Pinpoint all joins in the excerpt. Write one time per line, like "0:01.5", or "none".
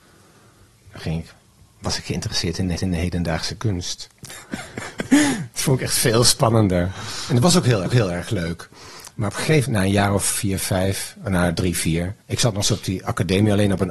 0:02.8
0:07.9
0:09.6
0:12.2
0:12.6